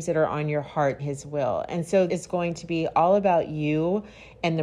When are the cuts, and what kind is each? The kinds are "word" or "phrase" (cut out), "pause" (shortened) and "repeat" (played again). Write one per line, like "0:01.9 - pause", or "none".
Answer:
0:01.0 - phrase
0:02.1 - phrase